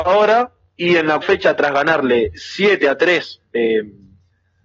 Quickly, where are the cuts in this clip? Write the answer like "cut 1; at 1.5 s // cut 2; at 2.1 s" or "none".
cut 1; at 1.2 s